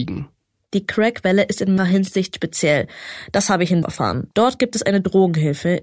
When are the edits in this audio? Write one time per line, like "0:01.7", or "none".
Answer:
0:01.8
0:03.8
0:04.3